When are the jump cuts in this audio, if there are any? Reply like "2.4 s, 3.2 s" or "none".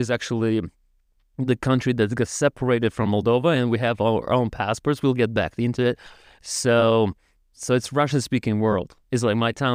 none